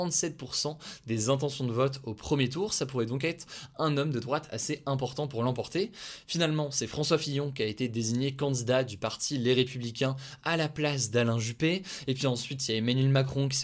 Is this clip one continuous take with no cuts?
yes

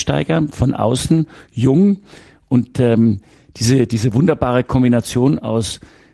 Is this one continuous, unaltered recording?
yes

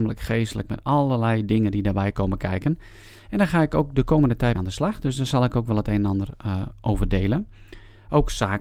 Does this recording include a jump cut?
yes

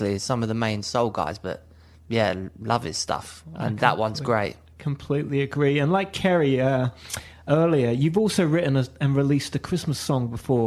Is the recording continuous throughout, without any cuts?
yes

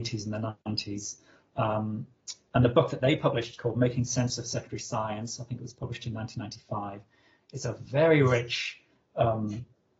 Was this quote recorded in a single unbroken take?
yes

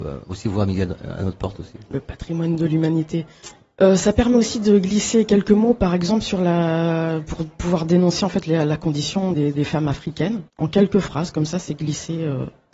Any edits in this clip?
yes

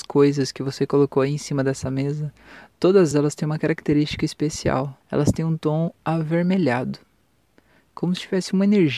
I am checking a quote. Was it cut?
yes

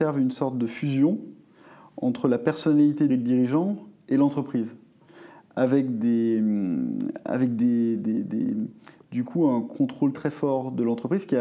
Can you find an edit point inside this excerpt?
yes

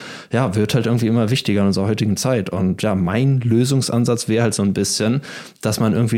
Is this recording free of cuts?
yes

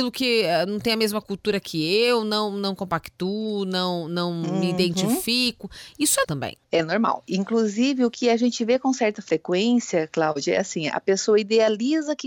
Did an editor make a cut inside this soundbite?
yes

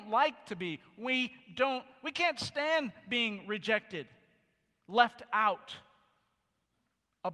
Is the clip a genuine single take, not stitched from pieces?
yes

